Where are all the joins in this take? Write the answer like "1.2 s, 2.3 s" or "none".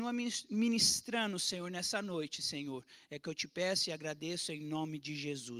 none